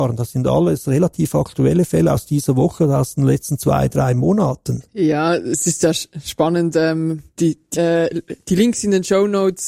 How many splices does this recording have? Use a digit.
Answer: 2